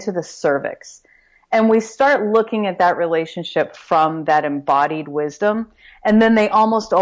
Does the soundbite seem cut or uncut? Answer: uncut